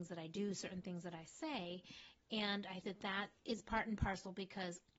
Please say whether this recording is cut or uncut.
cut